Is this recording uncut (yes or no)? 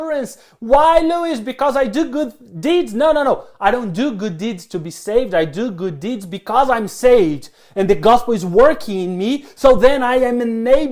yes